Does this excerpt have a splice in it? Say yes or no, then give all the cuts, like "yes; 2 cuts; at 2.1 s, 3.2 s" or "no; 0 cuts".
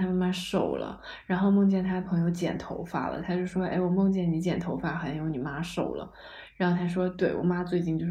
no; 0 cuts